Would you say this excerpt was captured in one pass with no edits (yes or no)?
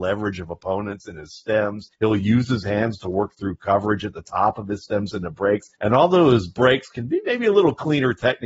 no